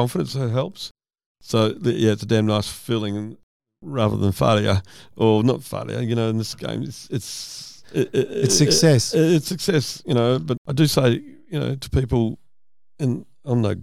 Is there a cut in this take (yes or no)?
no